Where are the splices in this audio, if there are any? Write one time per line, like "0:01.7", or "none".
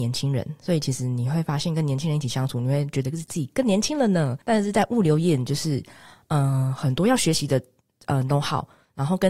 0:04.4